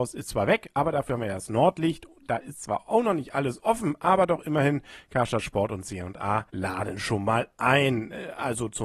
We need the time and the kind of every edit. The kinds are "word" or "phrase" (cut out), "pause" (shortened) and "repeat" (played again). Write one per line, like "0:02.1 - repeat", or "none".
0:06.5 - pause

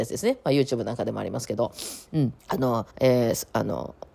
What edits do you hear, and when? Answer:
0:02.4 - pause
0:02.9 - pause

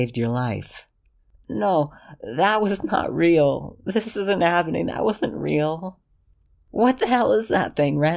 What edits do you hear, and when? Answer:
none

